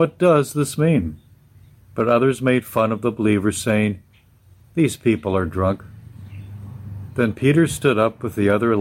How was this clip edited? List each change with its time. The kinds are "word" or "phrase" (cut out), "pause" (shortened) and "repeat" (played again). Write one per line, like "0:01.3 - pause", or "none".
none